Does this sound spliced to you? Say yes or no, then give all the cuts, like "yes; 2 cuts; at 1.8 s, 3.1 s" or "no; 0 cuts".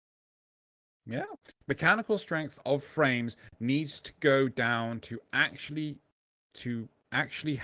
no; 0 cuts